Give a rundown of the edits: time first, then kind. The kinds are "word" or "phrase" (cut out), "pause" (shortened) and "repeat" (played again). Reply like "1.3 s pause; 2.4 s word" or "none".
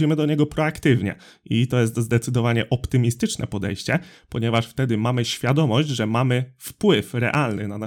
none